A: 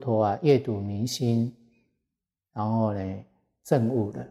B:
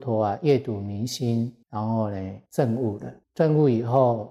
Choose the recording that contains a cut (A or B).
B